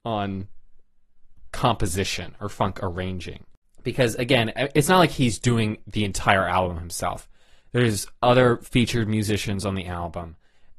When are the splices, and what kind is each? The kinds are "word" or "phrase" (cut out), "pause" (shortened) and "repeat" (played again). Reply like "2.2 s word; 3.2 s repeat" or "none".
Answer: 1.5 s phrase